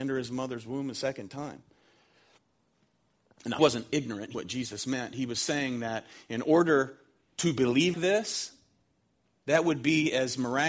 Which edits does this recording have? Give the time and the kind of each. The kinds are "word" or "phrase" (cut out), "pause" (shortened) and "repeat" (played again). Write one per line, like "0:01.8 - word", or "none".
0:03.6 - word
0:04.3 - word
0:07.9 - word